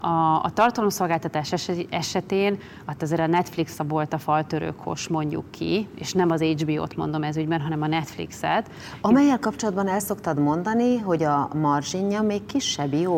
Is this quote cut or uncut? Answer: uncut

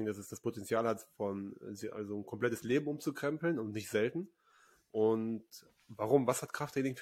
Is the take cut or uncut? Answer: uncut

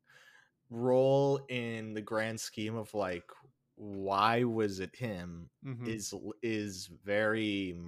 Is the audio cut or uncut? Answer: uncut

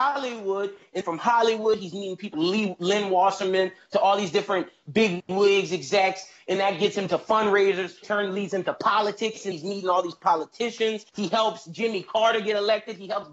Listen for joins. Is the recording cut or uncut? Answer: cut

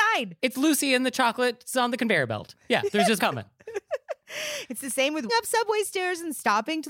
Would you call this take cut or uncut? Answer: cut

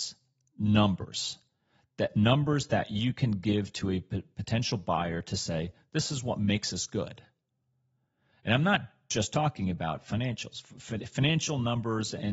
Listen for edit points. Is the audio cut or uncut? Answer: uncut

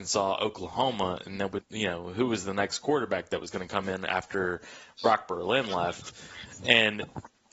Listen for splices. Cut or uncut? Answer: cut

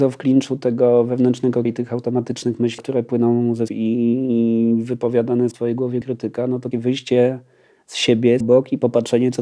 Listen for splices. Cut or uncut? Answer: cut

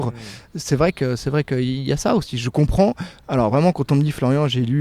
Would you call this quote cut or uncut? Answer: uncut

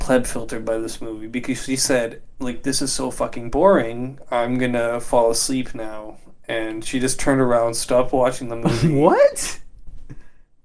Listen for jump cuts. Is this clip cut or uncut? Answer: uncut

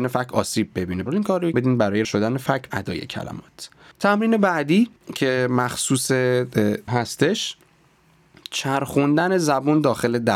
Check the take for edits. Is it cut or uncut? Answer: cut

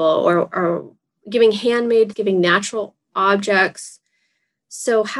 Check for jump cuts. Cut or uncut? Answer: cut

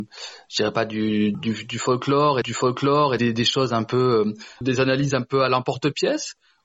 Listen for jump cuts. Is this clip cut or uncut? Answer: cut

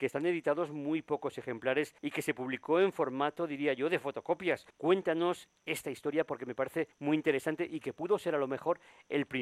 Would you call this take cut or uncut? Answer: cut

